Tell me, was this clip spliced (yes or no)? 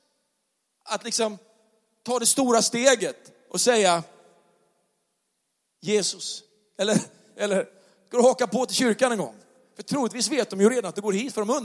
no